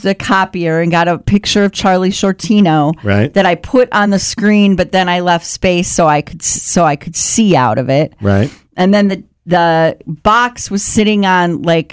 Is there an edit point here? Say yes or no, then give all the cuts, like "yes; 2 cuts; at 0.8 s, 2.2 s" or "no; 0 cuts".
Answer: no; 0 cuts